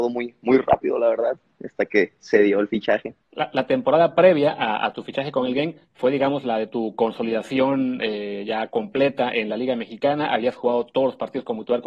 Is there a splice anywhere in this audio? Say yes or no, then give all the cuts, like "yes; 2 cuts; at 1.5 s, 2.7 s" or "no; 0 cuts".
yes; 1 cut; at 3.2 s